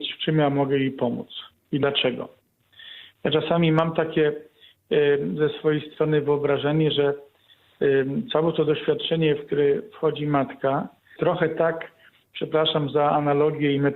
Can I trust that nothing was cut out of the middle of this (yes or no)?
no